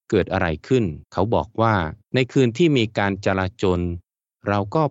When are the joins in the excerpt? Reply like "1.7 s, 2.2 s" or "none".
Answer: 1.0 s, 2.0 s